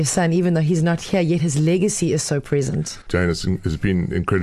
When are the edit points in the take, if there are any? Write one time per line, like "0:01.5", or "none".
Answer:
none